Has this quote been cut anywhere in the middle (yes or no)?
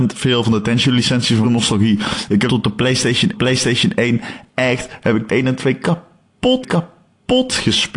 yes